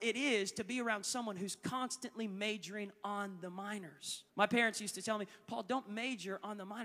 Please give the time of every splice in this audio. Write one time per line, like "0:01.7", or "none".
0:04.3